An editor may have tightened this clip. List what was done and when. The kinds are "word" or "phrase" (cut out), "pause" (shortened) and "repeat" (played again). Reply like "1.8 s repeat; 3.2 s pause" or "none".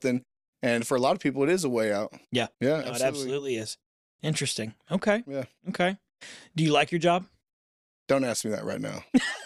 2.5 s pause

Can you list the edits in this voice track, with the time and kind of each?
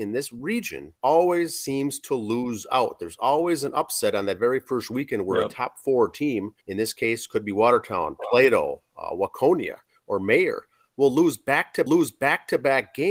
1.0 s pause; 6.6 s pause; 11.9 s repeat

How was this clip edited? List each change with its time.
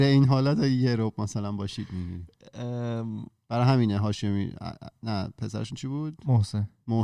none

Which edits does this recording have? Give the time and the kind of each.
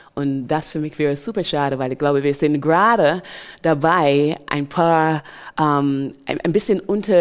none

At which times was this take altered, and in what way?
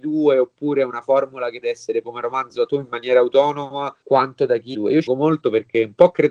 1.6 s word; 2.0 s word; 2.7 s word; 4.0 s pause; 4.7 s phrase; 5.1 s word

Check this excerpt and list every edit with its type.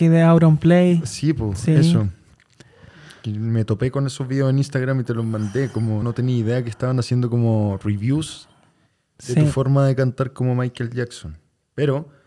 6.0 s word

